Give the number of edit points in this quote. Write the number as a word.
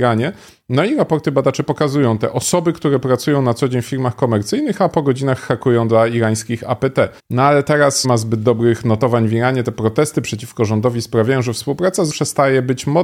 three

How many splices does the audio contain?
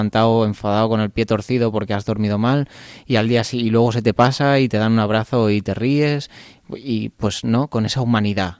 zero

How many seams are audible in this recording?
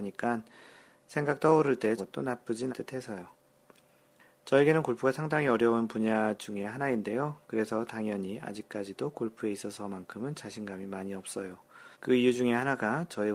three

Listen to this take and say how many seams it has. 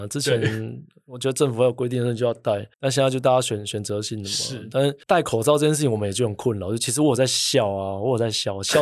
two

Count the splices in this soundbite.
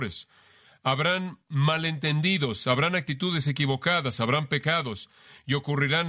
zero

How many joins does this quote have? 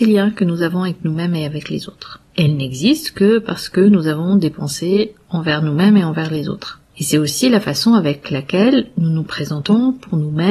two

